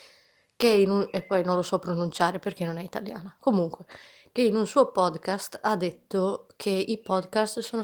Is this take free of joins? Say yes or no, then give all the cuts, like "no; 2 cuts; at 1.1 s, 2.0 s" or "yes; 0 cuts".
yes; 0 cuts